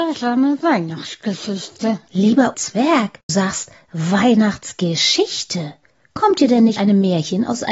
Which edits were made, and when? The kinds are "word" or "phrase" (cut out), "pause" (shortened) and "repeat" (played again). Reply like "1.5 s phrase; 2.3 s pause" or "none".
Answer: 2.5 s word; 3.3 s word; 6.8 s word